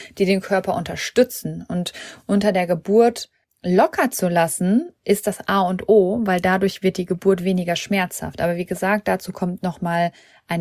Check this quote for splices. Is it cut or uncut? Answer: cut